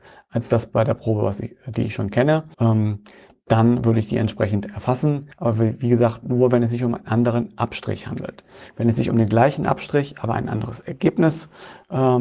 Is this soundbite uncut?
no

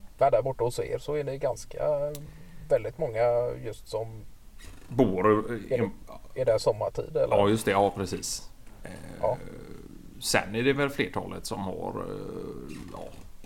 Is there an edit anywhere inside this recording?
no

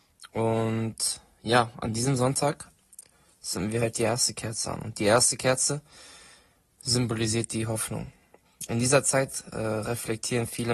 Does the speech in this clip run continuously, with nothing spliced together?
yes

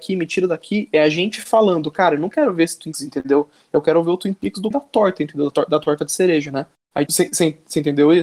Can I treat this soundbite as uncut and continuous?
no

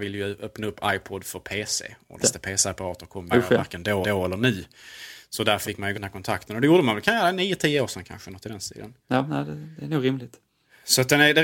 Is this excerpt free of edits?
no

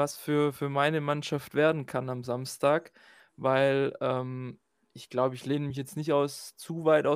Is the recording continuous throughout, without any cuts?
yes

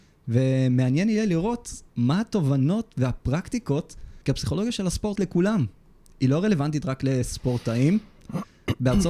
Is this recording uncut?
no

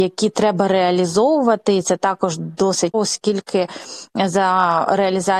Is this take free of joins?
no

